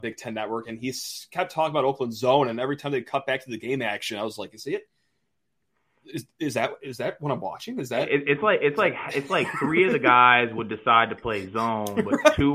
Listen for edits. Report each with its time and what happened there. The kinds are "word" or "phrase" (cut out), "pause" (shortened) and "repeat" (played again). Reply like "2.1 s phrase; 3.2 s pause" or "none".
none